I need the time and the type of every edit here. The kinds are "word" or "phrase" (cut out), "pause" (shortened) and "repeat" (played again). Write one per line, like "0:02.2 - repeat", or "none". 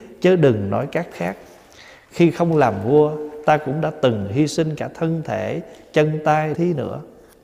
0:01.1 - word
0:06.5 - phrase

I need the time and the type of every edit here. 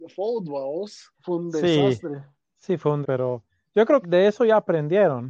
0:01.1 - pause
0:02.4 - pause
0:03.0 - word
0:04.0 - word

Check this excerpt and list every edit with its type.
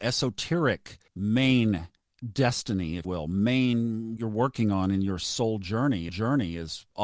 0:01.1 - pause
0:03.0 - word
0:04.2 - phrase
0:06.1 - repeat

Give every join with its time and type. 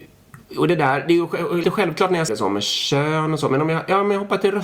0:01.6 - word
0:02.3 - word

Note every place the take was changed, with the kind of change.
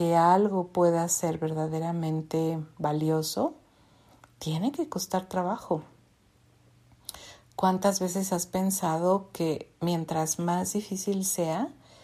none

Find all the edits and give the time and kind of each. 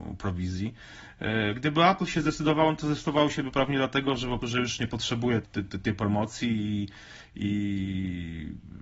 0:04.4 - word
0:05.4 - word

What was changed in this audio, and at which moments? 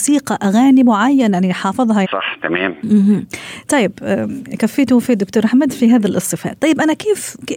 0:02.0 - phrase

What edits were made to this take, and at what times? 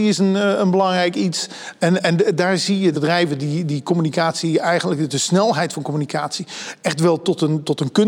0:02.9 - phrase

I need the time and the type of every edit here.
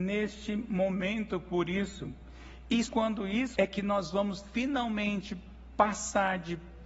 0:02.9 - word
0:03.5 - word

